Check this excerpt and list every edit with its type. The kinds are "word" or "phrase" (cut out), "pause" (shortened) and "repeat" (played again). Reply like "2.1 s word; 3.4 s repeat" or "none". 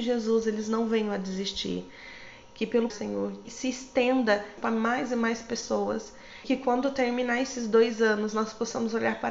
2.9 s word; 3.4 s word; 4.6 s phrase; 6.4 s word